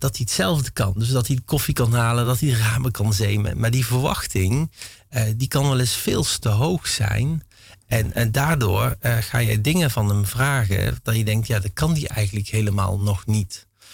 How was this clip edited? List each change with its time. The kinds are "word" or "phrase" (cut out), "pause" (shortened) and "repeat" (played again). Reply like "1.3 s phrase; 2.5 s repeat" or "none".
none